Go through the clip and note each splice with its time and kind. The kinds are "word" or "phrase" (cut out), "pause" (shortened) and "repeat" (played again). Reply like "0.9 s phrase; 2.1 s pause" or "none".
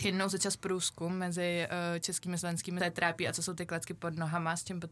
2.8 s phrase

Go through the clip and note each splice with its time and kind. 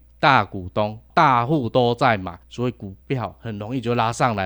2.4 s pause; 3.0 s pause

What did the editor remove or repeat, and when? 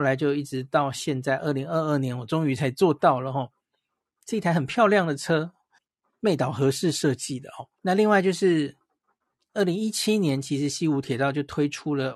5.8 s pause; 7.8 s pause

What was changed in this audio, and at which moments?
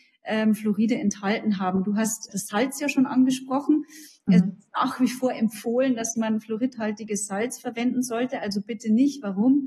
2.3 s word

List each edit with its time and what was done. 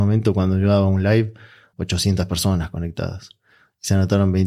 1.7 s word

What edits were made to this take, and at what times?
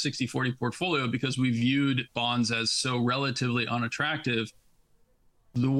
none

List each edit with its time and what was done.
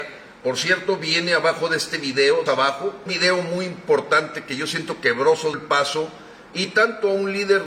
2.5 s word; 3.1 s phrase; 5.5 s word

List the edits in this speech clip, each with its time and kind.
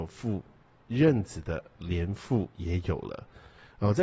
2.5 s pause

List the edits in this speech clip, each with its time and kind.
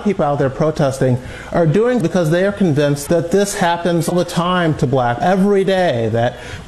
2.0 s word; 3.1 s word; 4.1 s word; 5.2 s word

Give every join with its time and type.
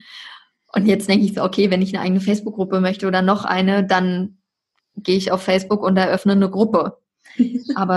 none

